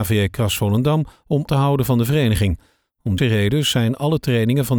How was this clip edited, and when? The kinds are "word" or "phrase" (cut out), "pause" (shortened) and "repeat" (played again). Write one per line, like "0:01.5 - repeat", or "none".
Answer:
0:01.5 - word
0:03.2 - word